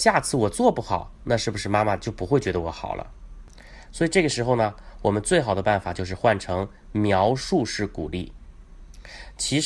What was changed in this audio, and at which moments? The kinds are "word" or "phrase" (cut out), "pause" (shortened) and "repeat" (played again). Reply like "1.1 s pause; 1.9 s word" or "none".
none